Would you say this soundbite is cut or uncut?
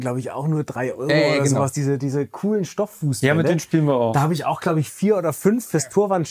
uncut